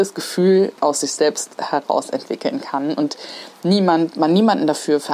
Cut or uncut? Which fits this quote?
uncut